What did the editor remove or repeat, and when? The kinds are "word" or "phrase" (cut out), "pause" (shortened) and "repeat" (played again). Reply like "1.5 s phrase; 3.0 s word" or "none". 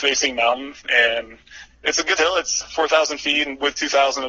2.2 s word; 2.6 s word